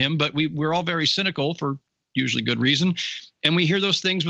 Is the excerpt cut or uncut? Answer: uncut